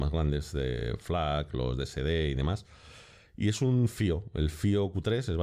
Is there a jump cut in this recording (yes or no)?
no